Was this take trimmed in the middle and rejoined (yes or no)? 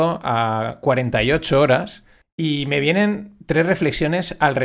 yes